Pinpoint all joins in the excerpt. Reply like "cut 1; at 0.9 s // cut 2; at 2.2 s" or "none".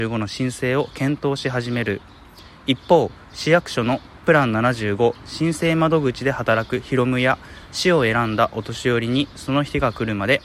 none